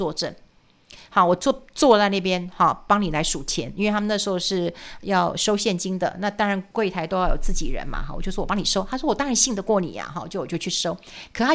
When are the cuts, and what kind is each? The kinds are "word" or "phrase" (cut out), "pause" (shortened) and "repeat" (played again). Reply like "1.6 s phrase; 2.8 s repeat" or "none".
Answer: 6.7 s pause